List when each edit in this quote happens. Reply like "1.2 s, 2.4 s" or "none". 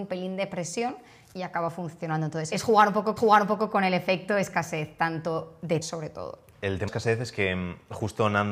3.2 s, 5.8 s, 6.9 s